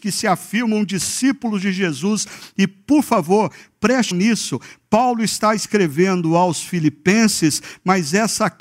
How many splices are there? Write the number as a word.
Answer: one